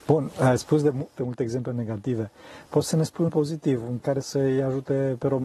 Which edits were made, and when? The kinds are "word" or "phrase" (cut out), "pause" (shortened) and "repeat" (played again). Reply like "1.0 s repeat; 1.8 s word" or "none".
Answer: 1.2 s word; 3.3 s word; 4.0 s word